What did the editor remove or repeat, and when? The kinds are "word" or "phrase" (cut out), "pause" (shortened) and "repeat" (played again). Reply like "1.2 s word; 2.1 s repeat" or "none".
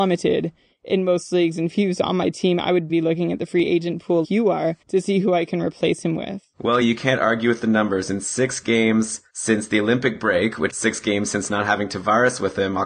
2.9 s word; 4.2 s word; 4.8 s pause; 6.8 s phrase; 9.3 s pause; 10.7 s word